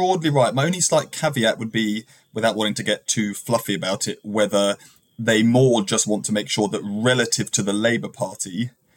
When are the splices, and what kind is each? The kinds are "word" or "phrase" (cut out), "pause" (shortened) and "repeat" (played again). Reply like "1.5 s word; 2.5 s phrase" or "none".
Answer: none

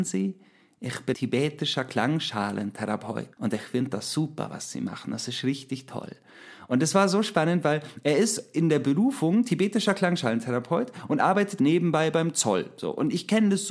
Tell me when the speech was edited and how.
1.1 s word; 3.3 s pause; 11.6 s word

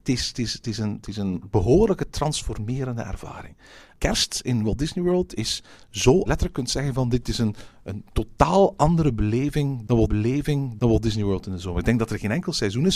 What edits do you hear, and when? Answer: 6.3 s phrase; 10.1 s repeat

